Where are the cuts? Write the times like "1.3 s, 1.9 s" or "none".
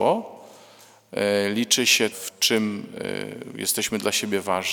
2.1 s